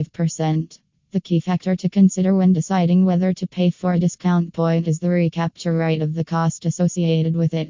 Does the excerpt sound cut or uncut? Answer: uncut